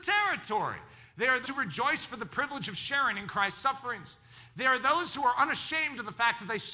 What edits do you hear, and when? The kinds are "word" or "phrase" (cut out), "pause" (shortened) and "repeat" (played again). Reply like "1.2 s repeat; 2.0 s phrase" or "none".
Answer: 1.4 s word